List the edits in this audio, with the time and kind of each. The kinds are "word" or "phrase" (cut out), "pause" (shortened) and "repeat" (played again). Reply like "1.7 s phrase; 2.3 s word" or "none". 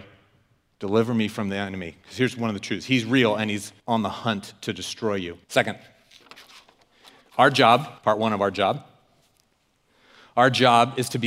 3.8 s pause; 5.4 s pause; 8.0 s pause